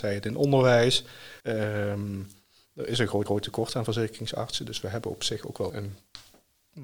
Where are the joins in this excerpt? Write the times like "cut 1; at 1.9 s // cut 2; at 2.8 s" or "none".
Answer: cut 1; at 1.4 s // cut 2; at 3.3 s // cut 3; at 5.7 s